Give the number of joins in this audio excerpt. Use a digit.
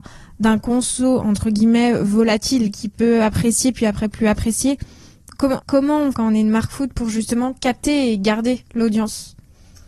2